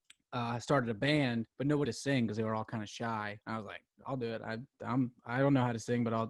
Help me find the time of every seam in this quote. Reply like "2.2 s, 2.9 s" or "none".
1.5 s, 1.8 s, 3.4 s, 5.2 s